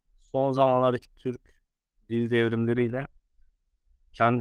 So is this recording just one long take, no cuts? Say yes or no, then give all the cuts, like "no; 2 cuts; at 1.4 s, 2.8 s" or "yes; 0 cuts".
yes; 0 cuts